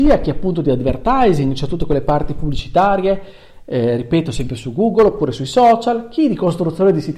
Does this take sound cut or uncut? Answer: uncut